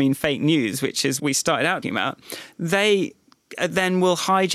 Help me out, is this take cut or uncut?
cut